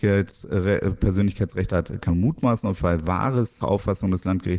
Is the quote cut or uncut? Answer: cut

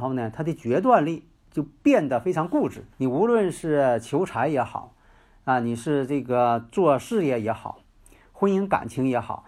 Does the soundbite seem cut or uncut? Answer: cut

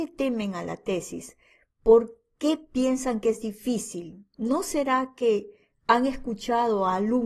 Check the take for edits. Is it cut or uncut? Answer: uncut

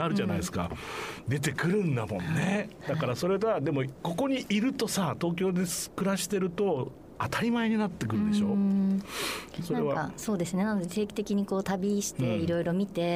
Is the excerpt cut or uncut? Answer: cut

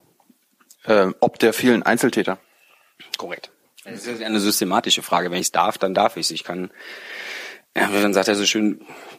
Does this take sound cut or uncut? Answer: cut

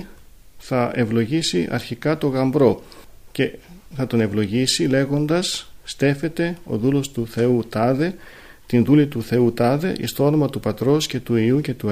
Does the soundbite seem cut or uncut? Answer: uncut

